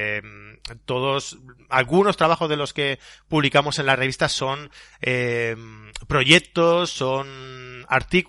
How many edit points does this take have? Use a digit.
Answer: 0